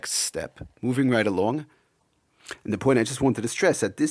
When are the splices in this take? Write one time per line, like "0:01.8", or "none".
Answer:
none